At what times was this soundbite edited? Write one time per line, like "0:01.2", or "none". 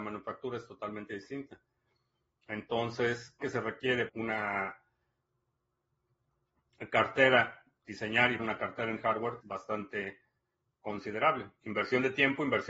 0:03.4
0:04.1
0:07.8
0:08.4
0:09.4